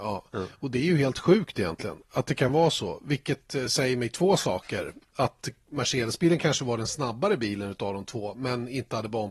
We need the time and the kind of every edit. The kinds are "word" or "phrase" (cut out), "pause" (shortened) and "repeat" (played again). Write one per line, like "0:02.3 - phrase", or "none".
none